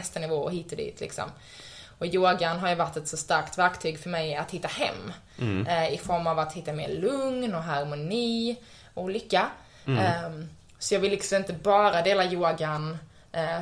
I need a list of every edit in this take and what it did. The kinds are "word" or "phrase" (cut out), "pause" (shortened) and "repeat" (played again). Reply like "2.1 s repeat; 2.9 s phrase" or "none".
none